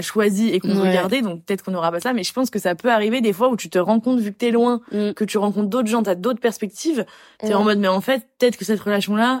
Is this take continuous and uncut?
yes; 0 cuts

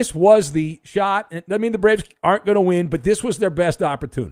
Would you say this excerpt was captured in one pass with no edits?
yes; 0 cuts

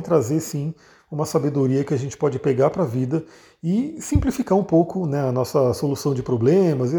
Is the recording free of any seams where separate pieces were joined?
yes; 0 cuts

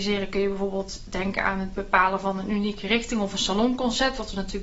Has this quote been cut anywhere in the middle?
no; 0 cuts

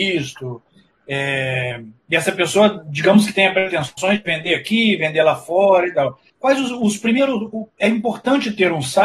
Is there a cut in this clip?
yes; 2 cuts; at 6.3 s, 7.7 s

